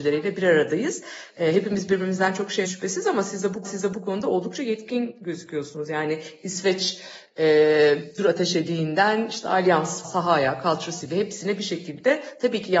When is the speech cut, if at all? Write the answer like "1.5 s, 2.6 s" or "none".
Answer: 2.6 s, 3.6 s, 8.2 s, 10.0 s

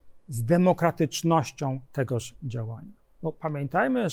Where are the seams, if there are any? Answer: 1.9 s

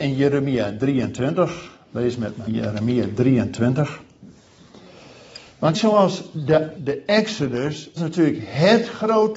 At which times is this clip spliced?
2.5 s, 5.7 s, 6.8 s, 8.0 s

